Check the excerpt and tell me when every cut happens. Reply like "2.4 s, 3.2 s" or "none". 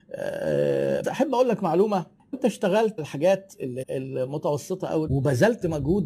1.0 s, 2.3 s, 3.0 s, 3.8 s, 5.1 s